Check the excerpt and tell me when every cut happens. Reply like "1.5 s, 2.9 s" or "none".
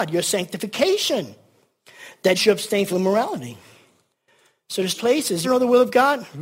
2.4 s, 2.9 s, 5.0 s, 5.4 s